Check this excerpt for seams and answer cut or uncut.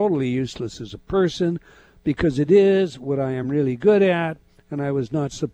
uncut